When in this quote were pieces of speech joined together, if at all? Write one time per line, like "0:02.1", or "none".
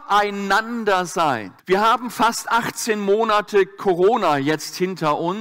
0:01.6